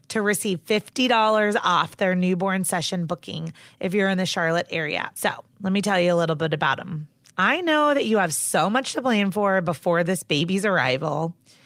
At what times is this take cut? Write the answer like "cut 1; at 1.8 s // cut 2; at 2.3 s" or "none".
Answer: none